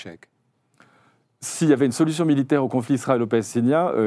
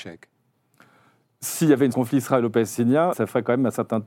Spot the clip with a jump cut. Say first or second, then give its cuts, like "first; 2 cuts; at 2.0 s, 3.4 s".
second; 2 cuts; at 1.9 s, 3.1 s